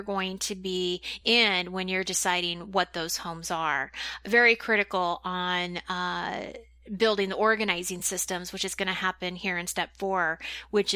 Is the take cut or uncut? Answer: uncut